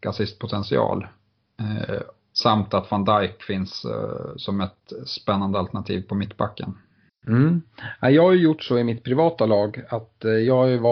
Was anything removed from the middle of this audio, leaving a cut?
yes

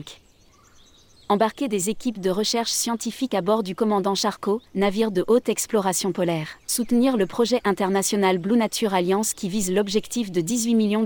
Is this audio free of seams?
no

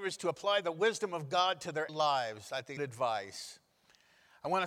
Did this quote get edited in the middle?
yes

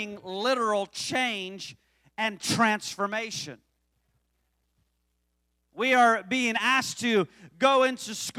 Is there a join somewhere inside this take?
no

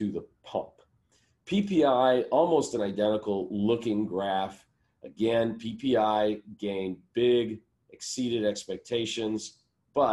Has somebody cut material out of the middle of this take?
no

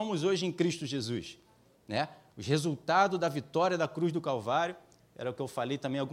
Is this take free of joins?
yes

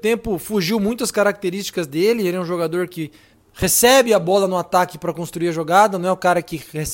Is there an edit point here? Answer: yes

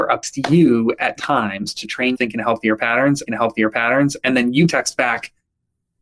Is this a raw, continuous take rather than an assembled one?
no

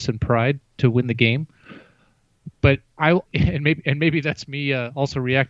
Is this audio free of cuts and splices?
no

